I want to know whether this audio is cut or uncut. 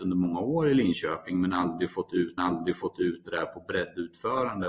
cut